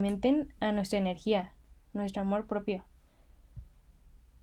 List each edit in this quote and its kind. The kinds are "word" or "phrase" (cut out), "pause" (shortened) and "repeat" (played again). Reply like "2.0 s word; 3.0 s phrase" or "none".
none